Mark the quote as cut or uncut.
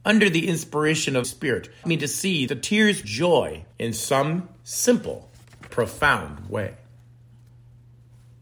cut